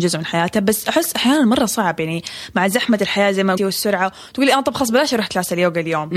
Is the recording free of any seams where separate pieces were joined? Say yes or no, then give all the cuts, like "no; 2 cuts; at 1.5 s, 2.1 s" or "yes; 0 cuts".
no; 1 cut; at 3.6 s